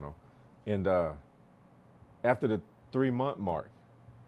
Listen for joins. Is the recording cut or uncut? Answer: uncut